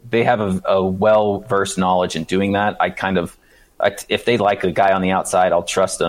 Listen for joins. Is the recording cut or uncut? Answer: uncut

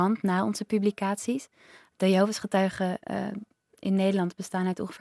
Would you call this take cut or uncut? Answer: uncut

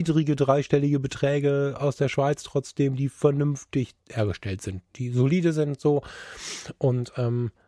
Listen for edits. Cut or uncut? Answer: cut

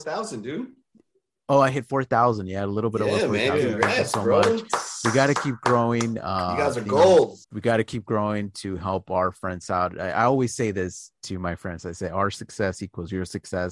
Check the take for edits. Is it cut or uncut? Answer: cut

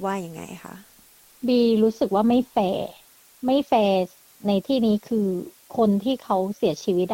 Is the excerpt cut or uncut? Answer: uncut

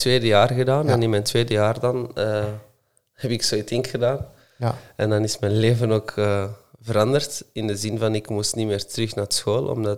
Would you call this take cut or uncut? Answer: uncut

